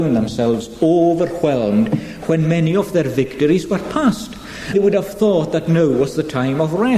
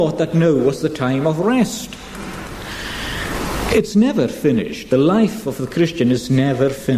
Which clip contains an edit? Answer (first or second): first